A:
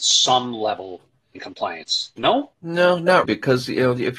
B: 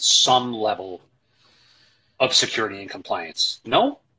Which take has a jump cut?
A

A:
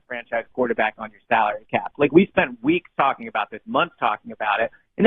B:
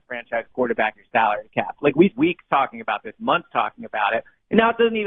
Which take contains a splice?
B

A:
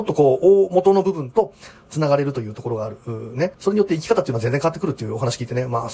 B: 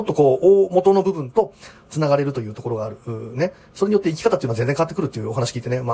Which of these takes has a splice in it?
A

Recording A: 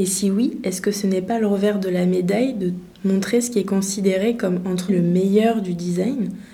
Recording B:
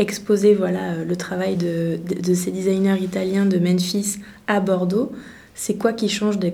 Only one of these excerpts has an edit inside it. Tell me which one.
A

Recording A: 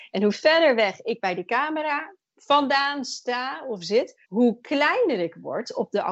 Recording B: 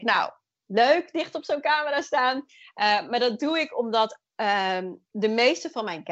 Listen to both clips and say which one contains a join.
A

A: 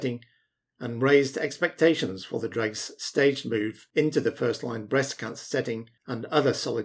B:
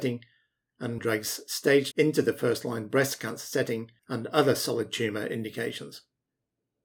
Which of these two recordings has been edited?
B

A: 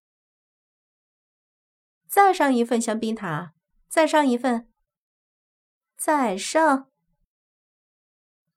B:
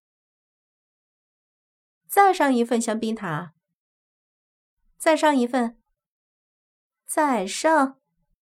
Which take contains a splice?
A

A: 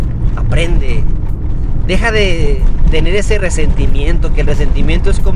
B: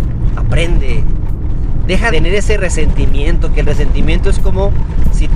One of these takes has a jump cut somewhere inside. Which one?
B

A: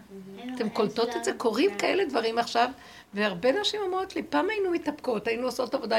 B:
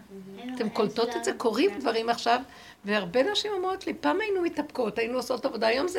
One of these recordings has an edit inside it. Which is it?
B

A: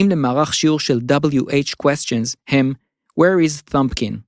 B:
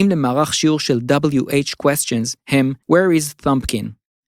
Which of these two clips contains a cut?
B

